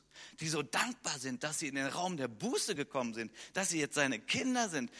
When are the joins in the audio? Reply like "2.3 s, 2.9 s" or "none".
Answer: none